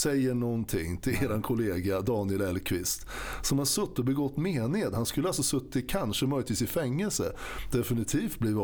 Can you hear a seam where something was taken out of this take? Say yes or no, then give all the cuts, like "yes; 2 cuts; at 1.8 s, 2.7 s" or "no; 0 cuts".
no; 0 cuts